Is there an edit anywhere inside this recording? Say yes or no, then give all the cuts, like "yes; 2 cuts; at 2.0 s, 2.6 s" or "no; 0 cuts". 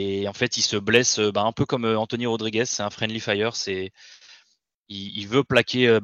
no; 0 cuts